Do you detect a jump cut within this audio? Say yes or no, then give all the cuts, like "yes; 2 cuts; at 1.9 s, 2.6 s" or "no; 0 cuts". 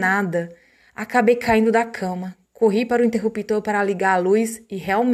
no; 0 cuts